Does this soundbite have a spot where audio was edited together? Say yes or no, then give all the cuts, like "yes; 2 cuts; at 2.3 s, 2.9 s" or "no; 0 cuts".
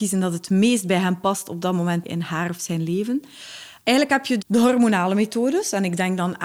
yes; 1 cut; at 4.4 s